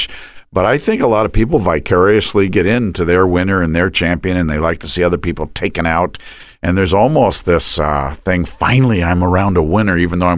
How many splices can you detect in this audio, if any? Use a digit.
0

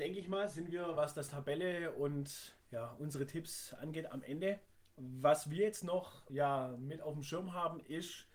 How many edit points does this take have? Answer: 3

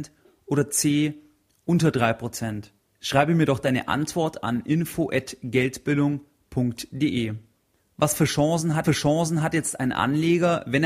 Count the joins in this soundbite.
1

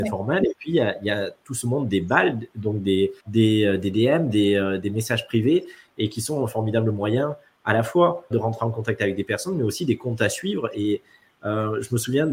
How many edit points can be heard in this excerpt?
2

